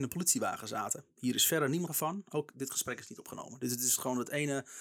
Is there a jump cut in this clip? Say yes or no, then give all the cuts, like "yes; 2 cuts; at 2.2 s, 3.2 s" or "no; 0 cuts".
yes; 1 cut; at 1.9 s